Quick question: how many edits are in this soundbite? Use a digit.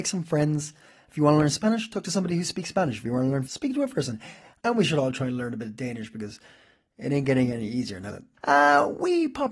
3